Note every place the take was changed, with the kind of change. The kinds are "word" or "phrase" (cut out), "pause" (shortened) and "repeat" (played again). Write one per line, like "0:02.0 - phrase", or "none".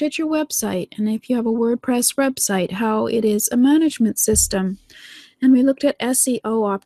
none